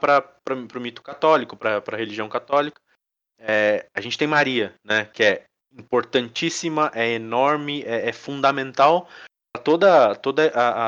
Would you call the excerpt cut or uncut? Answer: uncut